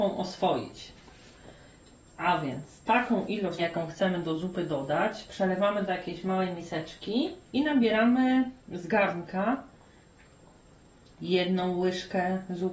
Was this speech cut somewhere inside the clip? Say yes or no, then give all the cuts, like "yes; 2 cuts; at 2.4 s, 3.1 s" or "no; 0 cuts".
yes; 2 cuts; at 3.6 s, 7.5 s